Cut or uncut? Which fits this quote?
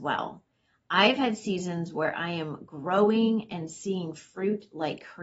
uncut